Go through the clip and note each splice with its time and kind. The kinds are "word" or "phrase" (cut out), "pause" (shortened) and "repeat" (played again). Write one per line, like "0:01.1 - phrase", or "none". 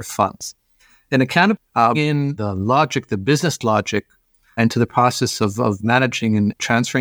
0:01.5 - phrase
0:01.9 - word
0:04.6 - word